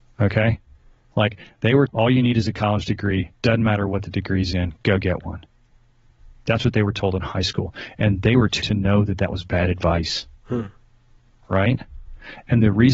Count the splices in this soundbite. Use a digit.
2